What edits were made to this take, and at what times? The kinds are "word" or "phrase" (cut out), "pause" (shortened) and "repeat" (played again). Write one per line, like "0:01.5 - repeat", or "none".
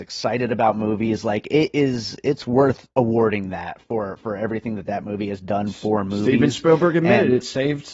0:02.9 - pause